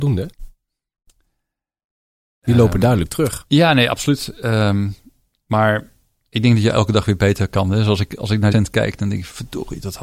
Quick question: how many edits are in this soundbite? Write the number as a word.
one